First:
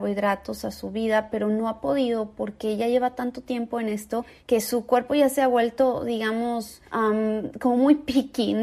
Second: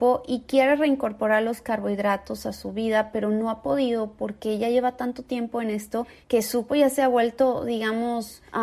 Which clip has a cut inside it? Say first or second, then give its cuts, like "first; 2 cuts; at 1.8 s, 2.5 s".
second; 1 cut; at 6.7 s